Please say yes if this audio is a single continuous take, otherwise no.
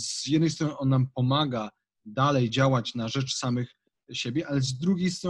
yes